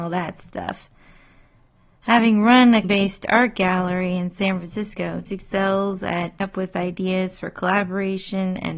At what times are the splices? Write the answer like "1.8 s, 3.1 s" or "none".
2.8 s, 5.2 s, 6.4 s

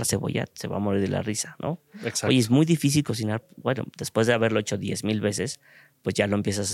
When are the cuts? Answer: none

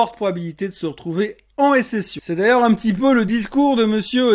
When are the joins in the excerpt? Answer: none

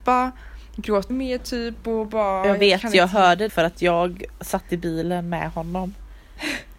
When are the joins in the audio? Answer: 1.1 s, 3.5 s

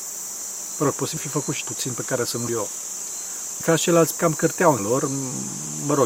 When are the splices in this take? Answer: 1.2 s, 1.6 s, 2.5 s, 3.6 s, 4.2 s, 4.8 s

